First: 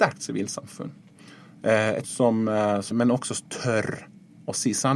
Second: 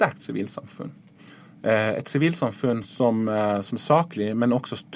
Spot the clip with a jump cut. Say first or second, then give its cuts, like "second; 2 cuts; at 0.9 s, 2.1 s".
first; 2 cuts; at 2.0 s, 2.9 s